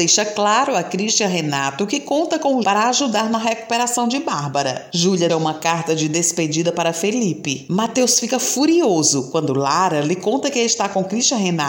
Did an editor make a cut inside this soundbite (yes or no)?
yes